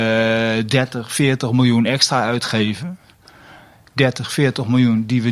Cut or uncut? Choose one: uncut